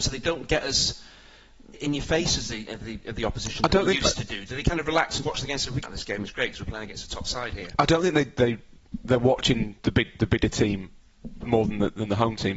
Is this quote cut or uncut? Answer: cut